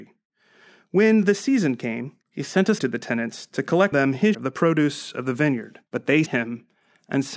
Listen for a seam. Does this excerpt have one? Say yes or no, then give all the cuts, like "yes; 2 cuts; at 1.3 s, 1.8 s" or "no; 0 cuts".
yes; 6 cuts; at 2.2 s, 2.8 s, 3.9 s, 4.3 s, 5.9 s, 6.3 s